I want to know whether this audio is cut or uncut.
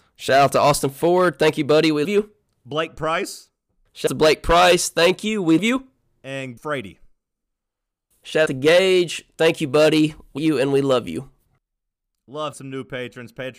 cut